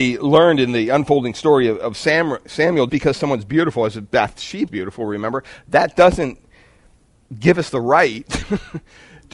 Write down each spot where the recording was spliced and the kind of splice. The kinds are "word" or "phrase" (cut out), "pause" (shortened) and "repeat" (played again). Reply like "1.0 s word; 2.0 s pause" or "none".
2.9 s word; 4.7 s word